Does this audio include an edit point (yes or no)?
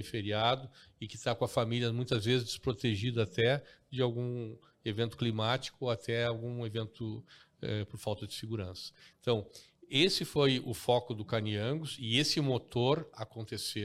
no